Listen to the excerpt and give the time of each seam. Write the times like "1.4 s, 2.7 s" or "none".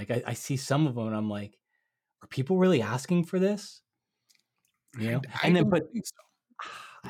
none